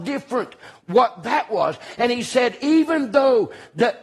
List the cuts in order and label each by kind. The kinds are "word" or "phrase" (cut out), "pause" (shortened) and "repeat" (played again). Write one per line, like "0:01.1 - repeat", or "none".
none